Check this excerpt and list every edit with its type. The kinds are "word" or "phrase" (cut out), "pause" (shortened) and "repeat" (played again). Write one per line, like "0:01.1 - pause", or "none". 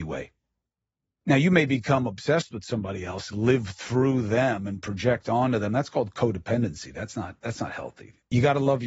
0:03.3 - phrase